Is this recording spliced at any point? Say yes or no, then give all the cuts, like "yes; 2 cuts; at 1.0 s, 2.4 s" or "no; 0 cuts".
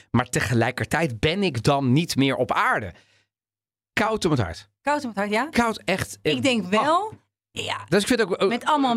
no; 0 cuts